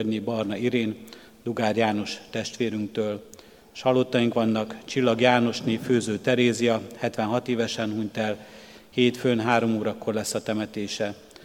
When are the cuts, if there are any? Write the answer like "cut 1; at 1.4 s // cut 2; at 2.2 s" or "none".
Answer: none